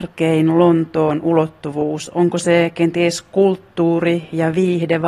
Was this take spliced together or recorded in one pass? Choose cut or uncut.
uncut